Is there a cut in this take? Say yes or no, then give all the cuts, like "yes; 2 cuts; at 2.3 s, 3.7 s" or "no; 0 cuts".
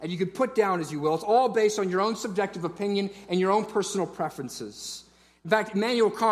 no; 0 cuts